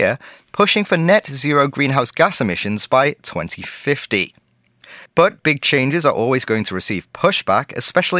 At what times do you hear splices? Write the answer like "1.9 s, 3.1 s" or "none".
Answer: 5.1 s